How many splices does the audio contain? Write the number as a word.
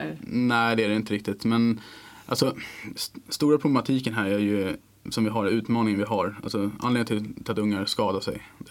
one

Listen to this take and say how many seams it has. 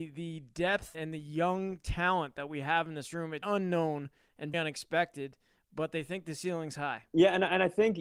four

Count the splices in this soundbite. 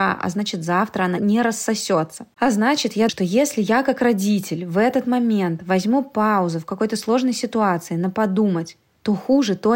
two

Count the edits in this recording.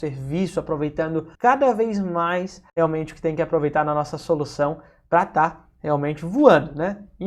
two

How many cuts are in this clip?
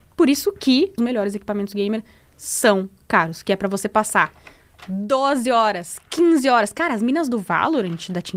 one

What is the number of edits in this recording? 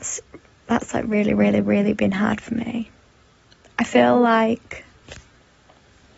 zero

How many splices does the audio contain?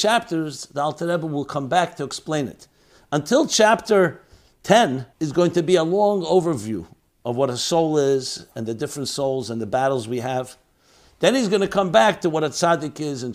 one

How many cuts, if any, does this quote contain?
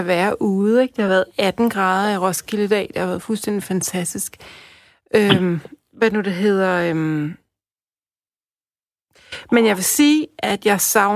zero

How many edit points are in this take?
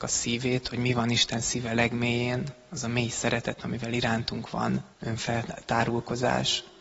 one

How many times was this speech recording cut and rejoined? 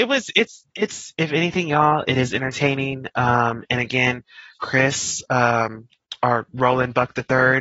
zero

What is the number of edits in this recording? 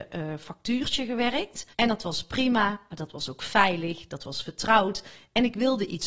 one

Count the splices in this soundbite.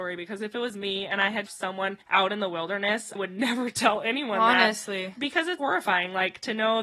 four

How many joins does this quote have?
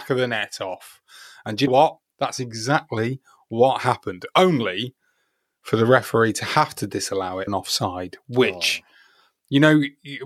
two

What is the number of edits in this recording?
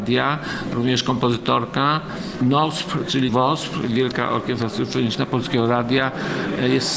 one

